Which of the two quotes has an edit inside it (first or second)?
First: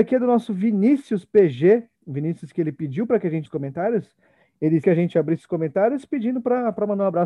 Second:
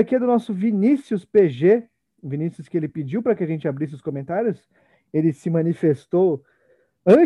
first